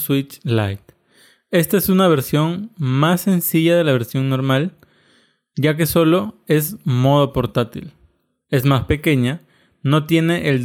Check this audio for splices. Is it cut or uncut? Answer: uncut